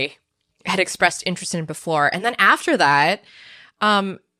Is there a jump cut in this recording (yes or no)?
no